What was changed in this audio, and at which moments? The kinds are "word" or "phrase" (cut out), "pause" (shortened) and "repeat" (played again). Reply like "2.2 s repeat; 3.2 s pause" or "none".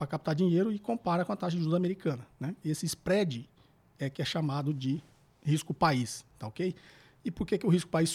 none